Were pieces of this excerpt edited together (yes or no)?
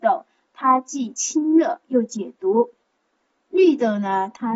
no